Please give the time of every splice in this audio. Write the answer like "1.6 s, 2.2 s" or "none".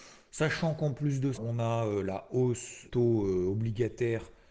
1.3 s, 2.9 s